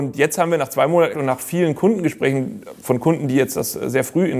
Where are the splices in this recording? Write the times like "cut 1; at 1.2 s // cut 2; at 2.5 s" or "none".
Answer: cut 1; at 1.1 s